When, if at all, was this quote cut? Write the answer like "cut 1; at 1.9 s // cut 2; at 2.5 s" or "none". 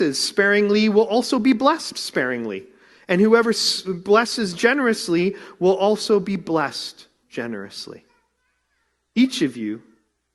none